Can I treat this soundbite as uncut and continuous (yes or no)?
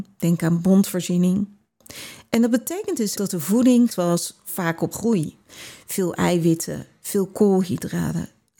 no